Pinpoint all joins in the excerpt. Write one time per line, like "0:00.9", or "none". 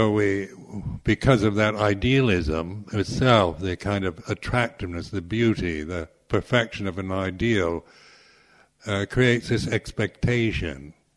none